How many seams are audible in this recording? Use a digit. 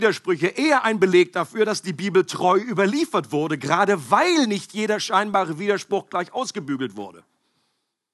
0